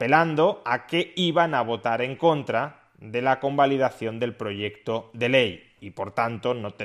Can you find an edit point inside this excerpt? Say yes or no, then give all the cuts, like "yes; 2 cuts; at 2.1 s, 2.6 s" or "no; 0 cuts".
no; 0 cuts